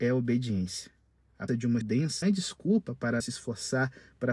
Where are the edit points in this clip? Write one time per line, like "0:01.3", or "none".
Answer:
0:01.5
0:01.8
0:02.2
0:03.2